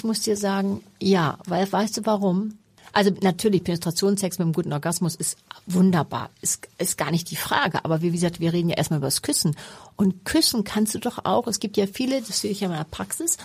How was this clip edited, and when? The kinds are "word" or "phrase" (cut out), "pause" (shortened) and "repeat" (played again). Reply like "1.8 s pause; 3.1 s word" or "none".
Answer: 2.8 s pause